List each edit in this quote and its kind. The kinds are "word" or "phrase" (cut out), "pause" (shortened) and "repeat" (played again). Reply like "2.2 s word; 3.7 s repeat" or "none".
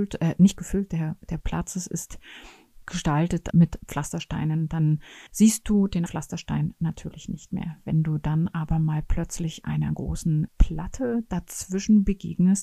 1.4 s phrase; 3.5 s word; 5.3 s pause; 6.1 s word; 10.5 s word